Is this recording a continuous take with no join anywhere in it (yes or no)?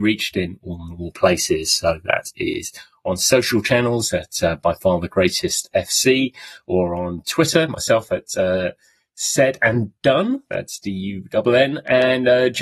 yes